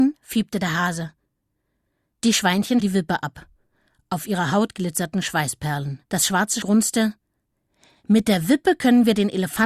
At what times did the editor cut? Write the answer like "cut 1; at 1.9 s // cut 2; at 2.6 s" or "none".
cut 1; at 2.8 s // cut 2; at 6.1 s // cut 3; at 6.6 s

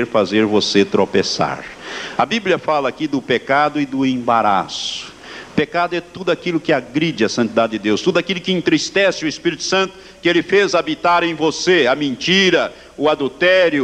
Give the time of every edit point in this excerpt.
none

